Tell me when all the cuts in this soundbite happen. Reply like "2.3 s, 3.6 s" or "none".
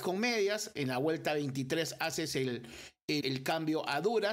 3.2 s